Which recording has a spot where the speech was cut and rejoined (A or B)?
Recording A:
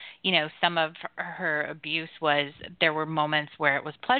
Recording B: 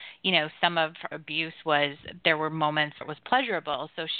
B